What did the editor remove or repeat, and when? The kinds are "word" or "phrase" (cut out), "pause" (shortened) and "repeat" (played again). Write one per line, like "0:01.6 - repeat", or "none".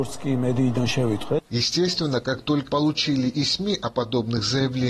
0:01.5 - pause
0:02.7 - word
0:03.3 - word